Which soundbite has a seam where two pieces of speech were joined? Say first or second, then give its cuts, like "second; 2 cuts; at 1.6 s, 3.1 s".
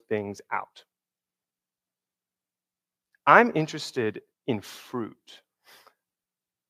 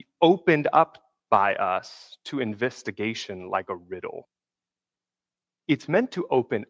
first; 1 cut; at 4.3 s